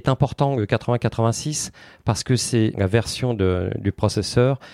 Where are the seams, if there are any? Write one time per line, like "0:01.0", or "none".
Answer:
0:02.7

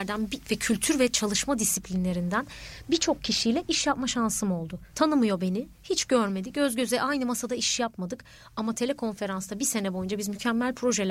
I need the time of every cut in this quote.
0:04.9

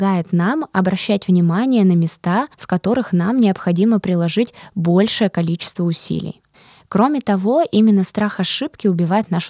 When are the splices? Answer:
0:02.5
0:06.5

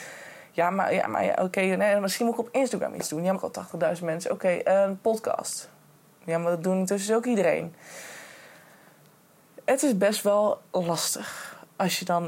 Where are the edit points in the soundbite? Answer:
0:03.3
0:10.7

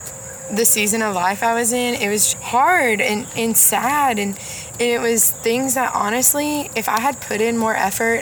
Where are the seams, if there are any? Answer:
0:02.3

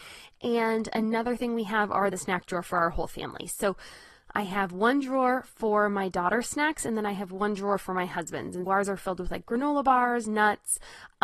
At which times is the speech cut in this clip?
0:02.1
0:04.3
0:08.7

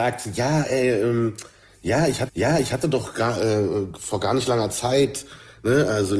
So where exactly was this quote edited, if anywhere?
0:02.3

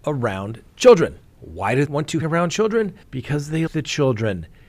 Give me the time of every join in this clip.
0:01.2
0:01.9
0:02.2
0:03.0
0:03.7

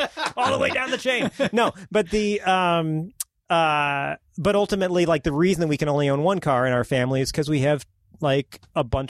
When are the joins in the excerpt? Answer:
0:04.3

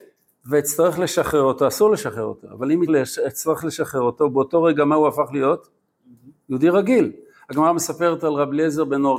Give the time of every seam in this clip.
0:02.9

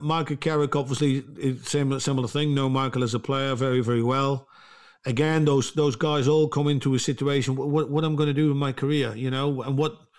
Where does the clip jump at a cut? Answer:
none

